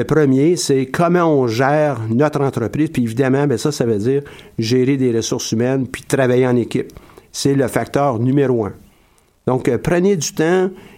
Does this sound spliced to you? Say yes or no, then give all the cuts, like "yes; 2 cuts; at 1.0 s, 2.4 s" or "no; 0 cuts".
no; 0 cuts